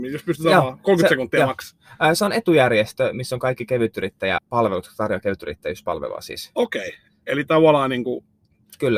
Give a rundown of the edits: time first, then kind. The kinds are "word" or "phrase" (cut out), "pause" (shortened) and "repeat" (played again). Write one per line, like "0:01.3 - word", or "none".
0:04.4 - word